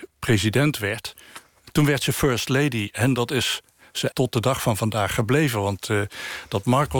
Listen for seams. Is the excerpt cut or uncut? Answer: cut